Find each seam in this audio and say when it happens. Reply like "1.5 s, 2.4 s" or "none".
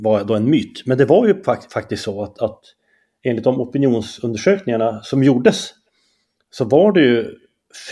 none

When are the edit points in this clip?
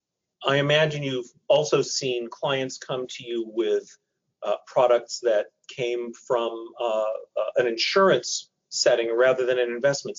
none

